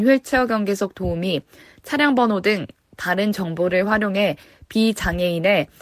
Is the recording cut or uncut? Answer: uncut